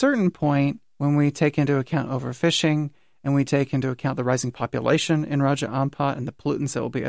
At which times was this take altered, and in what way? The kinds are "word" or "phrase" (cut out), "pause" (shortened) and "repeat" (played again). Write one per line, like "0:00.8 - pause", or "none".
none

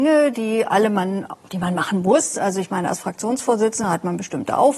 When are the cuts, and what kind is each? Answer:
none

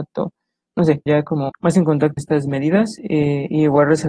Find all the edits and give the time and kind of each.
0:01.1 - word
0:01.5 - word
0:02.2 - word

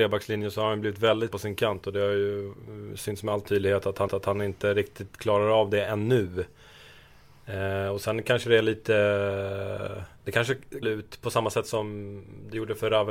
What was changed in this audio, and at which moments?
0:01.3 - word
0:04.1 - repeat
0:10.2 - pause
0:10.8 - phrase

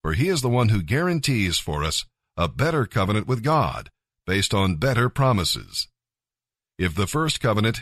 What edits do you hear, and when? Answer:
none

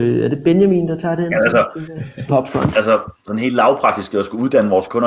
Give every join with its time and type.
0:02.3 - phrase

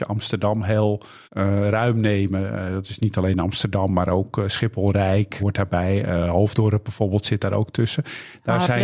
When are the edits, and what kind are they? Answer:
0:01.2 - pause
0:05.4 - word

